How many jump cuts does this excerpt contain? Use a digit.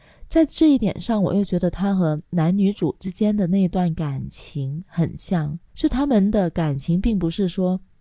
1